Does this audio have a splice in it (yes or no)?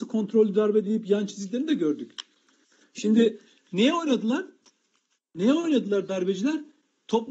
no